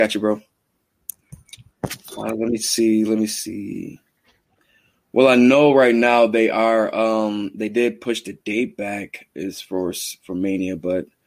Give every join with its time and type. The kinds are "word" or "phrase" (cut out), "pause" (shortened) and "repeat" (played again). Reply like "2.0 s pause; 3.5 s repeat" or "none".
none